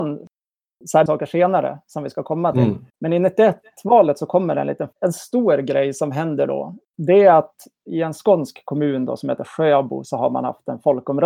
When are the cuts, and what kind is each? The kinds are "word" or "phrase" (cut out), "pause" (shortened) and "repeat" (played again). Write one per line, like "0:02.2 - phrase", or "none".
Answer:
0:01.1 - phrase
0:02.9 - pause
0:04.9 - phrase
0:06.9 - pause

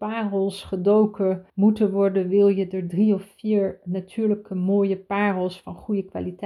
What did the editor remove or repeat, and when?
0:01.5 - pause

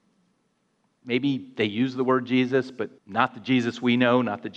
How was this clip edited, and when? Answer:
0:03.0 - pause

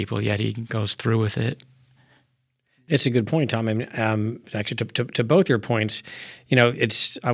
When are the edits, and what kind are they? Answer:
none

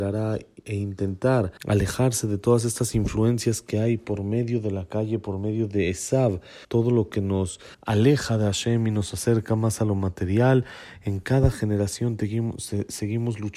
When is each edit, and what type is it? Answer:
0:01.6 - pause
0:06.6 - pause
0:07.7 - pause

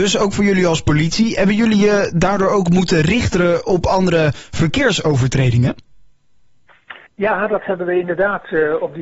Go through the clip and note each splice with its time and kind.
0:07.1 - pause

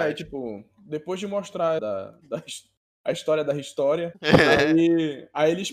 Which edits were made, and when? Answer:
0:01.8 - phrase

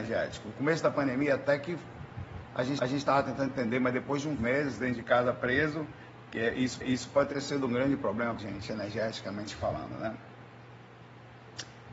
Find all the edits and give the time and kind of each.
0:02.8 - repeat
0:04.4 - phrase
0:06.8 - repeat
0:08.4 - word

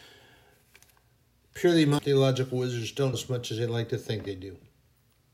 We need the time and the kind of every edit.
0:02.0 - word
0:03.1 - word

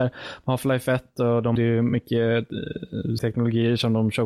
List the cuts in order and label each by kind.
0:01.6 - word
0:03.2 - word

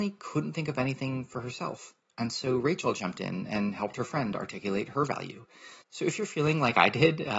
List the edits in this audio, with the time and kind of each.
0:02.0 - pause
0:05.8 - pause

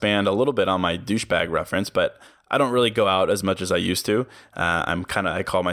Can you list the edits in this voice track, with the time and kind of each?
none

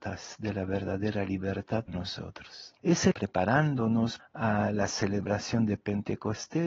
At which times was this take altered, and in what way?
0:01.9 - word
0:02.8 - pause
0:03.1 - phrase
0:04.2 - phrase

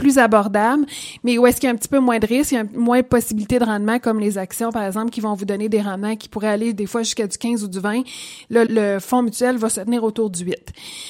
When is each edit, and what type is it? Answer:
0:08.7 - word

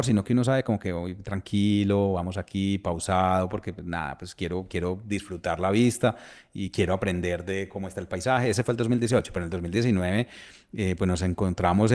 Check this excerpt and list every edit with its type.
none

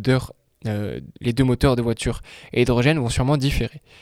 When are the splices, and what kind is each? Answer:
none

